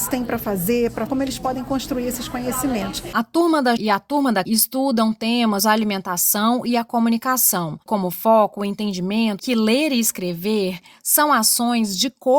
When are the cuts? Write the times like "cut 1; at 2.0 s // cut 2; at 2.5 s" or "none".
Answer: cut 1; at 1.1 s // cut 2; at 3.8 s // cut 3; at 4.5 s // cut 4; at 5.6 s // cut 5; at 7.9 s // cut 6; at 9.4 s